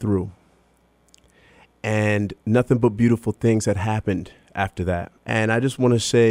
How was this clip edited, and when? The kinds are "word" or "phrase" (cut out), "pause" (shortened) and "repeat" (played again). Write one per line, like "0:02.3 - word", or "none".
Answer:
0:02.4 - pause
0:05.2 - pause